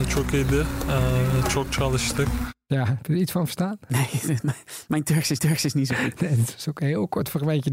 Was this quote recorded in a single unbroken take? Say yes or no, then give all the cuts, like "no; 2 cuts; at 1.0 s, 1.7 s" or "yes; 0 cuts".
no; 1 cut; at 5.4 s